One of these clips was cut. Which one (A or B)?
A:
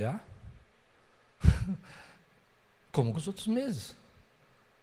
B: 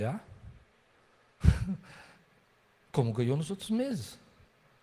A